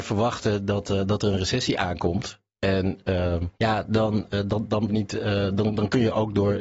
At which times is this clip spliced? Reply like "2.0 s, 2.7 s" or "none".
3.5 s, 4.9 s